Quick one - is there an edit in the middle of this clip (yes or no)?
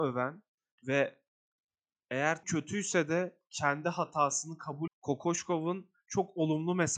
yes